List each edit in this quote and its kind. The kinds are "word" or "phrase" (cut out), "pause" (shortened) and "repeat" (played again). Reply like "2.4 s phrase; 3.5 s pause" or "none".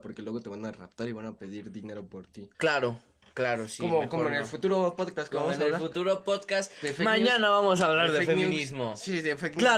2.5 s pause